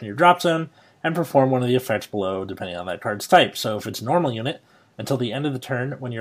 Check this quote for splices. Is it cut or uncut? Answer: uncut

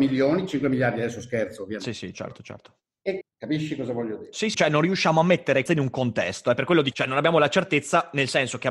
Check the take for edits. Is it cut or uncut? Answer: cut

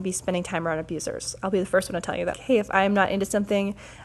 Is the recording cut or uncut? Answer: cut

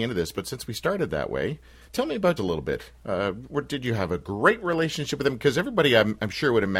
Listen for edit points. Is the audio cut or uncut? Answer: cut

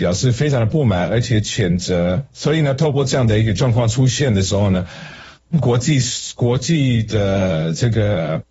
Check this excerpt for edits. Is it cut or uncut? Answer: uncut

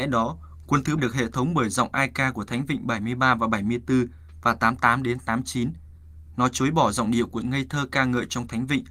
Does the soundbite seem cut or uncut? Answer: cut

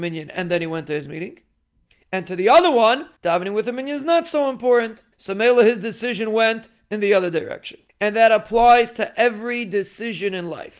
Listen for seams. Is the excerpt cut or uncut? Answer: cut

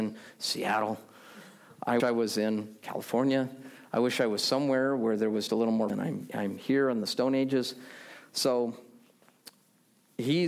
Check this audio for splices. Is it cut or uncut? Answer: cut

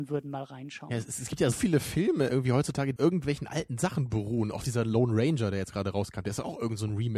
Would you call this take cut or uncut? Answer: cut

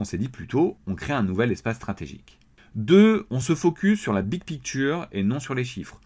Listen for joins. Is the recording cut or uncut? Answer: uncut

